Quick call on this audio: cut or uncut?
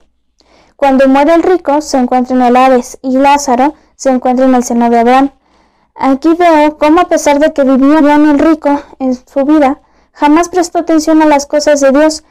cut